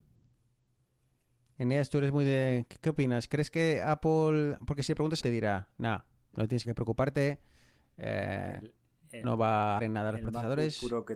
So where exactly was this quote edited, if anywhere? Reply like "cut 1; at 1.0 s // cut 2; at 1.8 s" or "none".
cut 1; at 5.2 s // cut 2; at 6.6 s // cut 3; at 9.2 s // cut 4; at 9.8 s